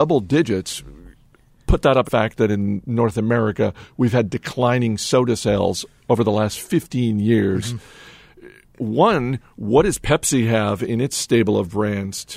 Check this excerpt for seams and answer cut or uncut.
cut